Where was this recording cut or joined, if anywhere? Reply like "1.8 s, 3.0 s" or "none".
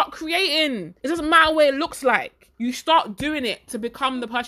1.0 s, 2.5 s